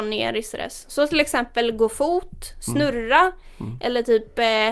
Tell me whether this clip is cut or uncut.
uncut